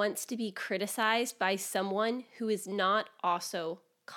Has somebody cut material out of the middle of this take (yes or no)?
no